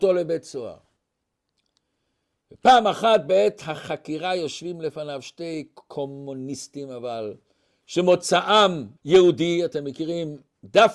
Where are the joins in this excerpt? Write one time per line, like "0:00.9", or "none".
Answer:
0:09.0